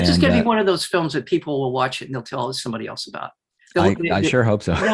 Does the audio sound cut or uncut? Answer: uncut